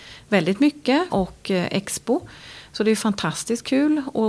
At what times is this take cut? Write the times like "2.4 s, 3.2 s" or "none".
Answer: 1.1 s